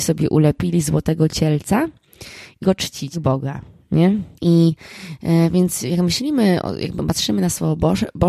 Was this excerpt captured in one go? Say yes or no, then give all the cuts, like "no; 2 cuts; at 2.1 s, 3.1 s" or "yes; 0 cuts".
no; 3 cuts; at 2.6 s, 3.1 s, 4.3 s